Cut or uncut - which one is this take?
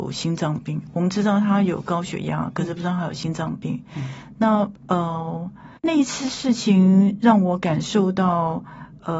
cut